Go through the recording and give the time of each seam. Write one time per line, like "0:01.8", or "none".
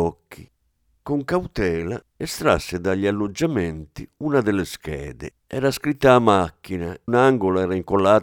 0:05.4
0:07.1